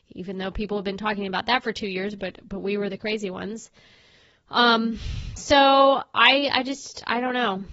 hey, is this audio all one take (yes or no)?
yes